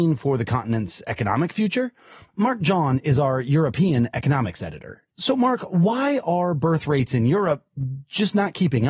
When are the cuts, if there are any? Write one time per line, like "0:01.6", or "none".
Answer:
none